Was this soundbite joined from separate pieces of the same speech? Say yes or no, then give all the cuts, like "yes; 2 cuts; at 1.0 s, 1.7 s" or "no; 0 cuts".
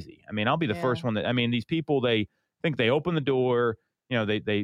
no; 0 cuts